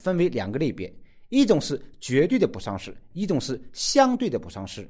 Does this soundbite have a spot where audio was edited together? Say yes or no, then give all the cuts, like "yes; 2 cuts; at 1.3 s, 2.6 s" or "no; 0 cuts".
no; 0 cuts